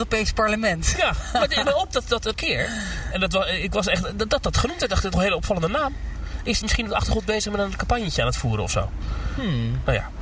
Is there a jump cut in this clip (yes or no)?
yes